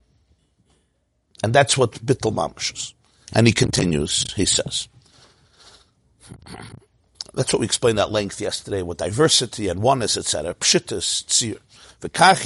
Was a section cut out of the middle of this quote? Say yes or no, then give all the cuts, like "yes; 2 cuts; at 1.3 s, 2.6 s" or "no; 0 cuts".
no; 0 cuts